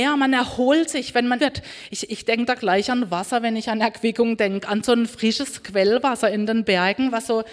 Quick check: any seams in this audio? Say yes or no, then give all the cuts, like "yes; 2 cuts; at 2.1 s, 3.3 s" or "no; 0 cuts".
yes; 1 cut; at 1.4 s